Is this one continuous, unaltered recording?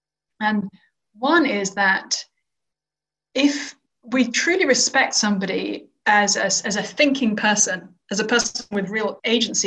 yes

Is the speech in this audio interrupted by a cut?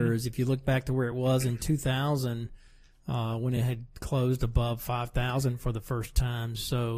no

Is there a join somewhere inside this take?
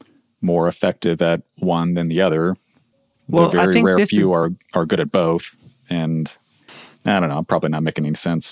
no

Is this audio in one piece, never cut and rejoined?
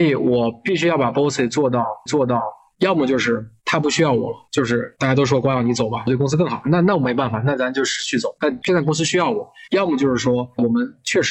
no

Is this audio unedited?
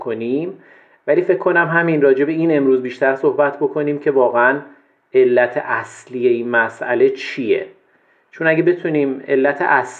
yes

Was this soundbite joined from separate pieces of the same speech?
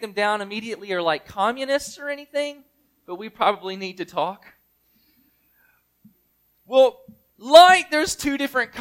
no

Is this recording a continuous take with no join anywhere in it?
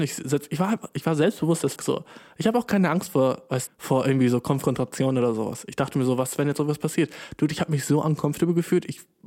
no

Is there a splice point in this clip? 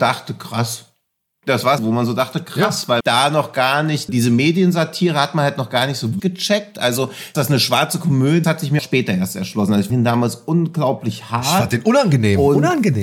yes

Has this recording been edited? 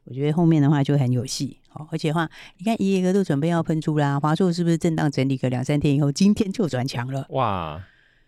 no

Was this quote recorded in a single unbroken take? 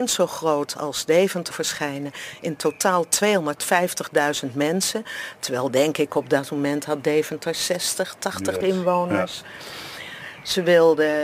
no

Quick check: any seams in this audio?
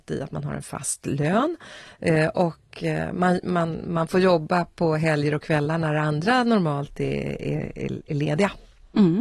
no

